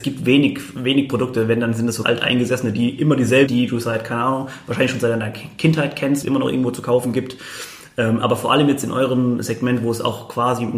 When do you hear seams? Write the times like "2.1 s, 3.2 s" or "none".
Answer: 2.0 s, 3.5 s, 6.2 s